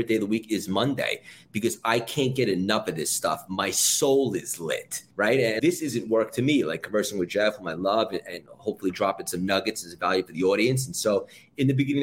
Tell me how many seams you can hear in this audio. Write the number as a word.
two